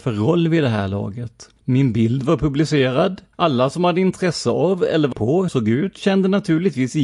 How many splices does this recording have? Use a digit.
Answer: 4